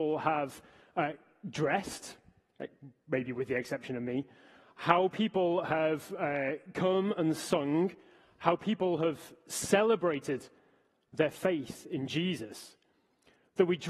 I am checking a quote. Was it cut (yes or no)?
no